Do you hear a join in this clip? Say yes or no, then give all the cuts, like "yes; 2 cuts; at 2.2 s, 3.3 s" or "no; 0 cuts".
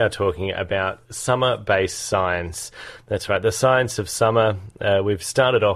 no; 0 cuts